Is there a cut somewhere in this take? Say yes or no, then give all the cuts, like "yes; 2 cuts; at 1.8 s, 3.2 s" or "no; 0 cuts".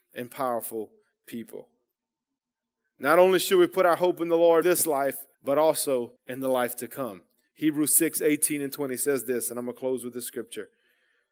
yes; 3 cuts; at 4.6 s, 5.3 s, 6.2 s